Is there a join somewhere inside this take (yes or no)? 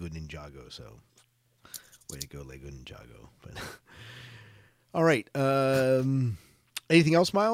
no